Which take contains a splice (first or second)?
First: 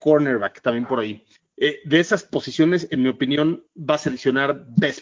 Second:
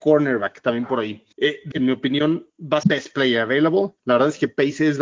second